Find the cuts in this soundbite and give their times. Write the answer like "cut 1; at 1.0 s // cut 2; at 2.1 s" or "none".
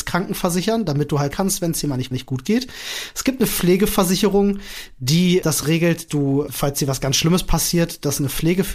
cut 1; at 1.3 s // cut 2; at 2.1 s // cut 3; at 5.4 s // cut 4; at 6.1 s // cut 5; at 6.5 s